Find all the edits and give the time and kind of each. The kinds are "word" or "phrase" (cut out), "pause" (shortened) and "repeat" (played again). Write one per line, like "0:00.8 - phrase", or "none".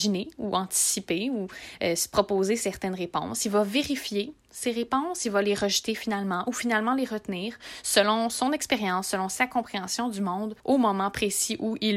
0:10.6 - pause